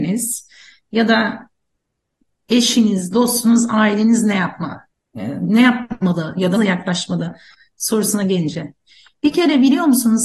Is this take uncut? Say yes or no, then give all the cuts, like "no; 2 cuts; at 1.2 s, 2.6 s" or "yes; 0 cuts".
no; 2 cuts; at 4.9 s, 6.6 s